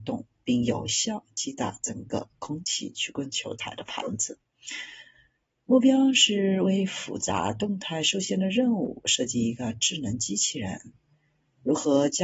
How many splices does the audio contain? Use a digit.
0